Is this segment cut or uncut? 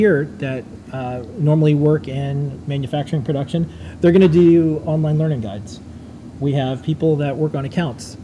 uncut